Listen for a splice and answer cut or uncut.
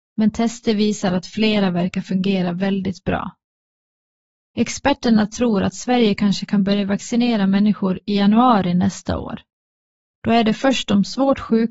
uncut